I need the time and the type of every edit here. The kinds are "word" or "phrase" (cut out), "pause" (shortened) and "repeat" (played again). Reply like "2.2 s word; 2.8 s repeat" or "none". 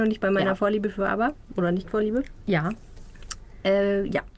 none